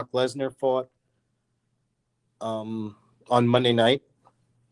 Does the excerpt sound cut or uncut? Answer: uncut